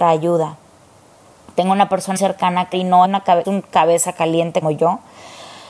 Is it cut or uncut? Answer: cut